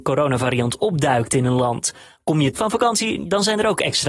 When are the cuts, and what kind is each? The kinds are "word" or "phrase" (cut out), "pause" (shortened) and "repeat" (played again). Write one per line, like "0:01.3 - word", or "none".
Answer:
0:02.5 - word